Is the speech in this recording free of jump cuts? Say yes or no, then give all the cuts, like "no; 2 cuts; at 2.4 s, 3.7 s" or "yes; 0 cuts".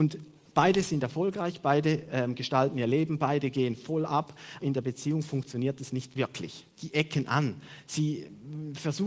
no; 2 cuts; at 4.6 s, 6.7 s